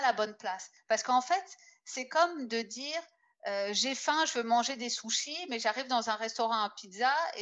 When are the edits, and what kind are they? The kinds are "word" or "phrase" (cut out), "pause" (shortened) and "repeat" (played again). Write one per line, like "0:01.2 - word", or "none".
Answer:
none